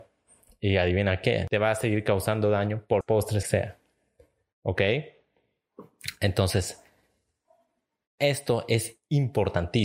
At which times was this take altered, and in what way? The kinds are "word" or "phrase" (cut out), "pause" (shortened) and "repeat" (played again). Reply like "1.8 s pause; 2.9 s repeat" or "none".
3.0 s word; 3.4 s phrase